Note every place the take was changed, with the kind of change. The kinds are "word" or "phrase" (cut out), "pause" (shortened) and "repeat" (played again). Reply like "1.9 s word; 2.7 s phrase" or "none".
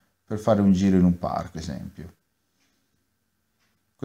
1.5 s word